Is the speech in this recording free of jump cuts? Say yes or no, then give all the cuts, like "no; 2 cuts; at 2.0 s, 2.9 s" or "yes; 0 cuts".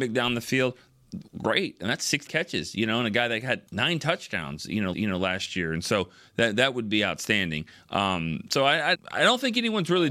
no; 5 cuts; at 1.3 s, 2.3 s, 3.7 s, 4.9 s, 8.9 s